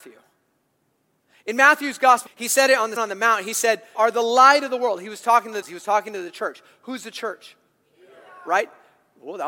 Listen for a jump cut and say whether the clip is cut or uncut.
cut